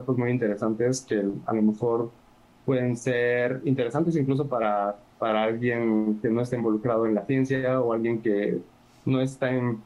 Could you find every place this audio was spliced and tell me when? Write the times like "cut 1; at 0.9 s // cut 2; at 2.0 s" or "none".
none